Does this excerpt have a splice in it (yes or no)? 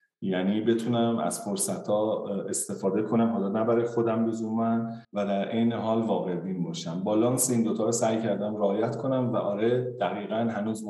yes